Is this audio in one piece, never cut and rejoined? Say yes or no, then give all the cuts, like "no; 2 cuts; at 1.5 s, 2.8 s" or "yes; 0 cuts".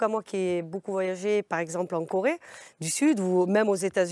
yes; 0 cuts